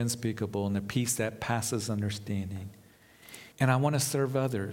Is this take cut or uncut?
cut